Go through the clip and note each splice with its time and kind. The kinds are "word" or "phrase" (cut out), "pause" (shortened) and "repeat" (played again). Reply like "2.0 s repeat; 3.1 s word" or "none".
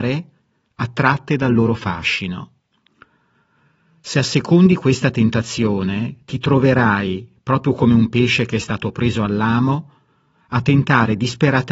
none